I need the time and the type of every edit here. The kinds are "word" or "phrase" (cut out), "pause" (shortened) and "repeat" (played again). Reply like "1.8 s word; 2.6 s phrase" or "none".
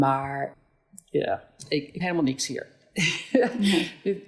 2.0 s word